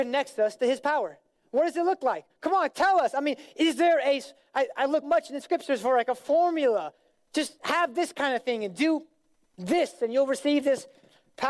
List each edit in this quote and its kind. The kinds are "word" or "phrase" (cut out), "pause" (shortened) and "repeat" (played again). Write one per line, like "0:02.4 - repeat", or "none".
0:05.0 - word